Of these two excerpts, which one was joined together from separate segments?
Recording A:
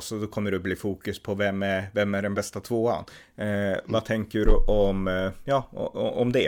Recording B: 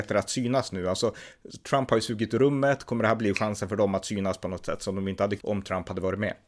B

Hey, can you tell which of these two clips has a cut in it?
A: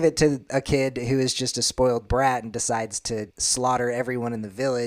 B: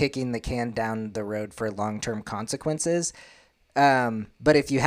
A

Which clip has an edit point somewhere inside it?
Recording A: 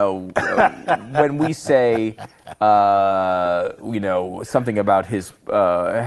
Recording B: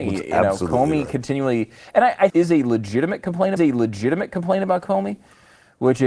B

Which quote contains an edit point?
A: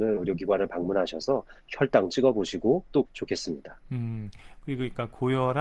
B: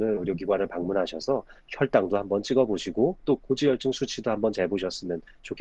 A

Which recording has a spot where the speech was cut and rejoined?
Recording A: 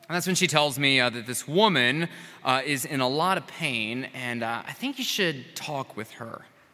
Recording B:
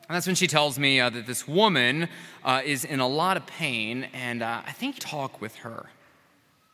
B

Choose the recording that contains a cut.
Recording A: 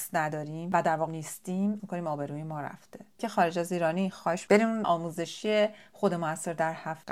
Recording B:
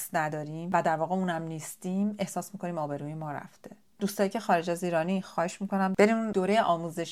A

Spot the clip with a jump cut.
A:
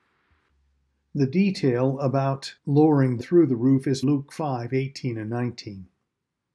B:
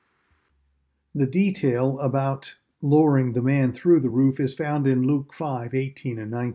A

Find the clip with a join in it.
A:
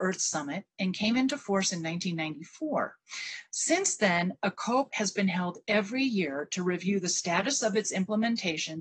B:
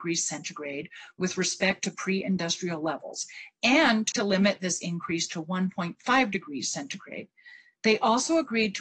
B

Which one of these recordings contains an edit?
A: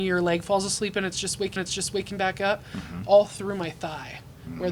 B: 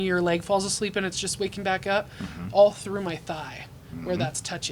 A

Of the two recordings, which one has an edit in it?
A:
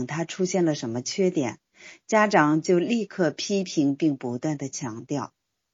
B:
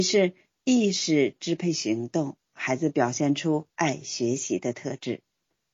B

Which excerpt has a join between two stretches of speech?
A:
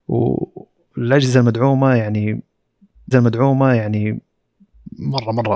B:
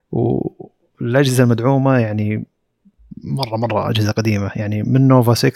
A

